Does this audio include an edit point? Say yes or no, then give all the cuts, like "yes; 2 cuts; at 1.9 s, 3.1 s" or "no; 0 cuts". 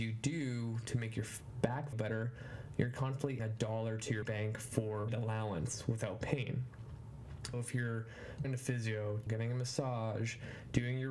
yes; 7 cuts; at 1.9 s, 3.4 s, 4.2 s, 5.1 s, 7.5 s, 8.4 s, 9.3 s